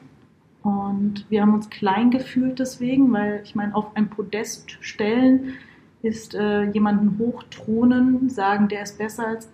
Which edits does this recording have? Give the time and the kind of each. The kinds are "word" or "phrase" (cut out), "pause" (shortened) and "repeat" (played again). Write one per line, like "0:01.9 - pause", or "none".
none